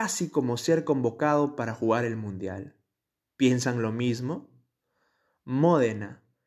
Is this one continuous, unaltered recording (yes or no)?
yes